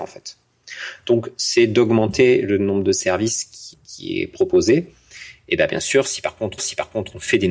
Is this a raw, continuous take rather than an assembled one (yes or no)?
no